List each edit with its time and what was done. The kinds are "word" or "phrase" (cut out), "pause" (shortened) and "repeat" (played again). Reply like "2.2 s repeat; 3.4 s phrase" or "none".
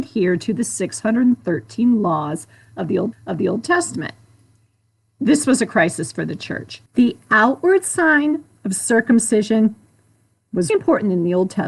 3.1 s repeat; 6.9 s pause; 10.7 s word